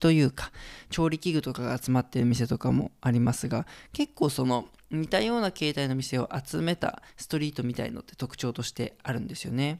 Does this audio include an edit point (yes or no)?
yes